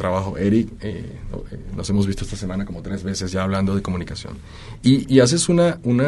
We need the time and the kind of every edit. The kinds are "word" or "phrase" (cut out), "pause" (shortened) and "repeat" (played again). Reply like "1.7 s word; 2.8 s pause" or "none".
5.0 s word